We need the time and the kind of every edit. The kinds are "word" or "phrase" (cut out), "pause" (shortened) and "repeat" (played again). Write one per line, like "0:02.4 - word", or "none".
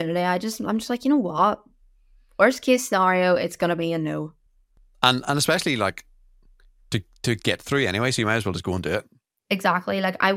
none